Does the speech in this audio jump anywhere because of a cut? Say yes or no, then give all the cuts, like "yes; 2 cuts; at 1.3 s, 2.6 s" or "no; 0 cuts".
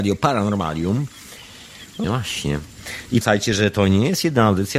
yes; 2 cuts; at 2.0 s, 3.2 s